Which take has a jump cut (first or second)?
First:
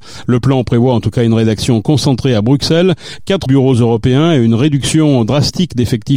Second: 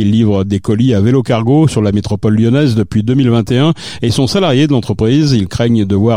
first